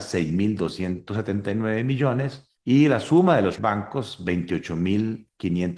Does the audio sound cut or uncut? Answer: cut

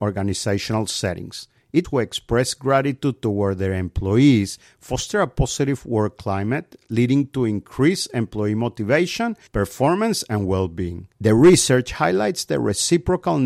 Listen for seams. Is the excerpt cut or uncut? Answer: cut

